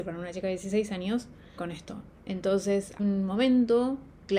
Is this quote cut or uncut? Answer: cut